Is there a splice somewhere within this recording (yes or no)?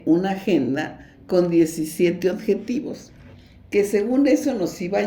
no